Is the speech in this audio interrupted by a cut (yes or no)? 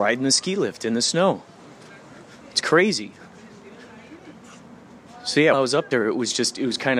yes